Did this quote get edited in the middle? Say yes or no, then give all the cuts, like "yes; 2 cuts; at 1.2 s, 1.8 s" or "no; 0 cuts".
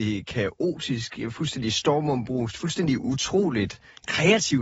no; 0 cuts